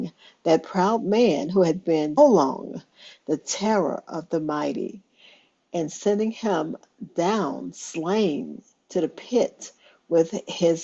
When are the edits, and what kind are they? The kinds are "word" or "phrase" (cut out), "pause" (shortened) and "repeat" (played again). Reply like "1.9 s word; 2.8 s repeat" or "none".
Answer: 2.2 s word